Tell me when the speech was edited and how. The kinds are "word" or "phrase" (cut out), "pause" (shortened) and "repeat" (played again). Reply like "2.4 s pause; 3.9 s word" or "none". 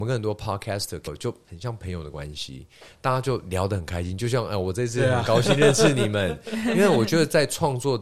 1.1 s phrase